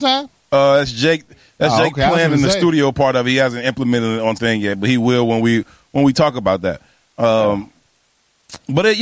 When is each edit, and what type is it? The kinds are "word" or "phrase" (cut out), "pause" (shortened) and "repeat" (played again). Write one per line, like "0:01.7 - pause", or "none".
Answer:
0:04.4 - word